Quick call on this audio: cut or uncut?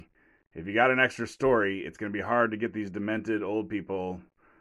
uncut